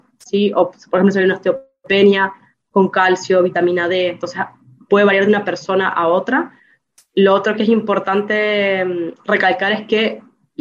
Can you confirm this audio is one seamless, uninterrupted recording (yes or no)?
yes